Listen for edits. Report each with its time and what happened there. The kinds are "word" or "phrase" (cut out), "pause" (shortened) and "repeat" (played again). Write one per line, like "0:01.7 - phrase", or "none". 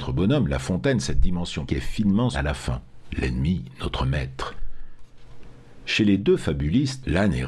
0:01.7 - word
0:02.3 - word